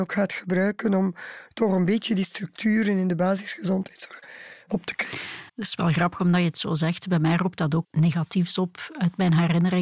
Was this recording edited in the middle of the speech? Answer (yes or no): yes